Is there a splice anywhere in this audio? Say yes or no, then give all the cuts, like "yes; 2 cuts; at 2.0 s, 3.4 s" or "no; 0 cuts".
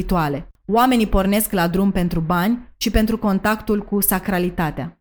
no; 0 cuts